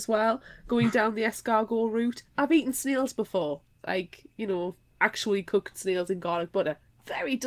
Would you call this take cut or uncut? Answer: uncut